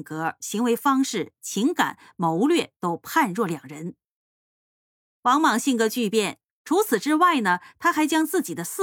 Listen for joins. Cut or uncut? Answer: uncut